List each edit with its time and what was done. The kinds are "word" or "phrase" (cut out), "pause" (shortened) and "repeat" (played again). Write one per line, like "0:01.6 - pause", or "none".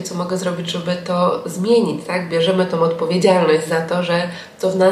none